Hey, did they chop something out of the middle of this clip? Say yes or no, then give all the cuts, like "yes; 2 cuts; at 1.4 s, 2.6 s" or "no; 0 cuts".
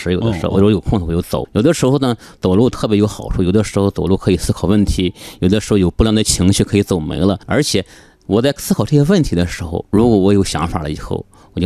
yes; 3 cuts; at 1.4 s, 7.4 s, 9.9 s